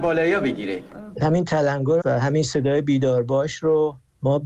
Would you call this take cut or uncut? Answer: cut